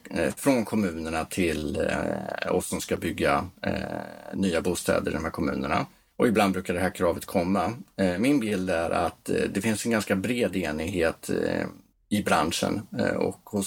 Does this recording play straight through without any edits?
no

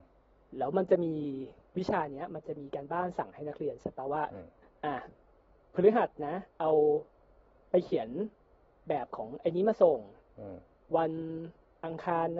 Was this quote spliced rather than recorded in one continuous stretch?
no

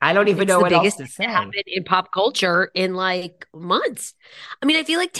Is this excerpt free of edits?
yes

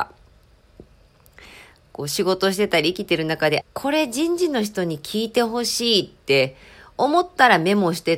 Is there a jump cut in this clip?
yes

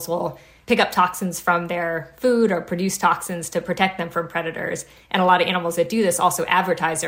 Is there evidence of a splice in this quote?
no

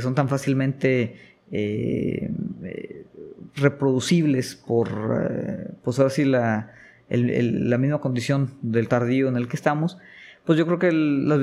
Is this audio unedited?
no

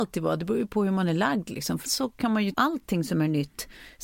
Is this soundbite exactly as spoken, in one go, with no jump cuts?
no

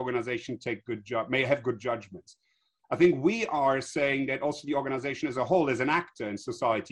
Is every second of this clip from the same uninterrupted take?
yes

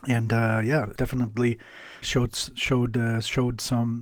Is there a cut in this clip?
yes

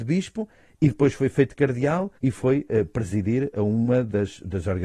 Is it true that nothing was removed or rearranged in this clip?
no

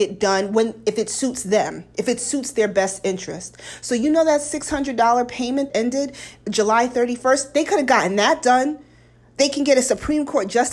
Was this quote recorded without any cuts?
no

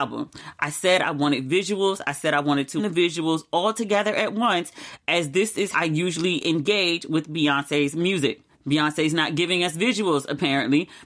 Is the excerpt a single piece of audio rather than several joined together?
no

